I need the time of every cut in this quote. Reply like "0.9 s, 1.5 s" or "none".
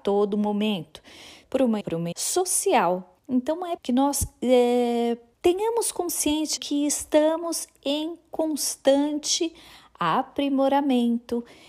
1.4 s, 1.8 s, 2.1 s, 3.2 s, 3.8 s, 5.3 s, 6.6 s